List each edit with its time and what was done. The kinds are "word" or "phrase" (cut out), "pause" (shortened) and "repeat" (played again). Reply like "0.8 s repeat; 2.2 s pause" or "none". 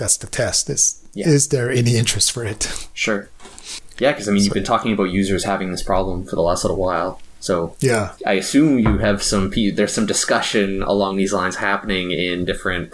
8.2 s pause